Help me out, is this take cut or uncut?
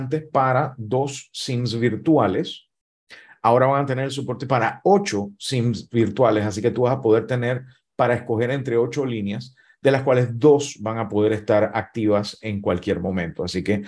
uncut